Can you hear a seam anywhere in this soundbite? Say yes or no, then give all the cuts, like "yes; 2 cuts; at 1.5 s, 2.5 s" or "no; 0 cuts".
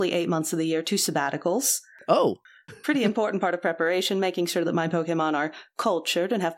no; 0 cuts